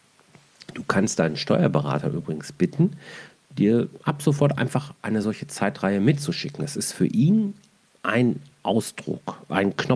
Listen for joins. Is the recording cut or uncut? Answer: uncut